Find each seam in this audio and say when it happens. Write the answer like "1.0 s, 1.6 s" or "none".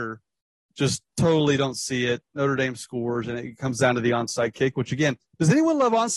5.3 s